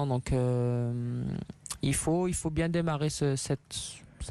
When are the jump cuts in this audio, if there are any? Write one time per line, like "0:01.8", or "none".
none

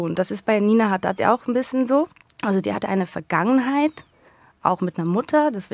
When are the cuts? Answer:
none

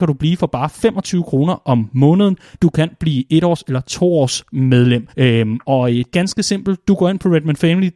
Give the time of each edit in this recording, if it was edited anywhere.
0:02.5
0:05.1
0:06.1

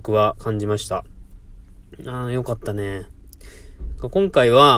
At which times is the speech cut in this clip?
none

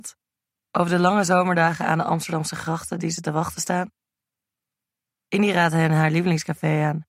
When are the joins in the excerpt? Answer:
none

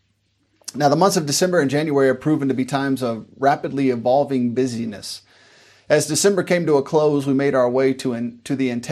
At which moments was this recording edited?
none

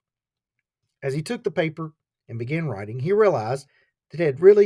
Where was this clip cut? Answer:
none

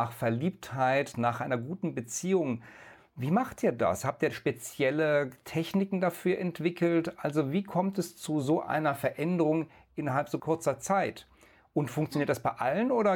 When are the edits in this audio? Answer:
none

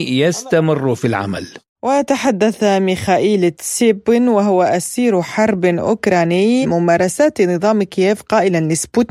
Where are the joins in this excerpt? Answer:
0:06.6

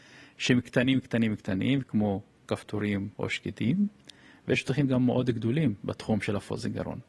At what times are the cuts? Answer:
0:03.1

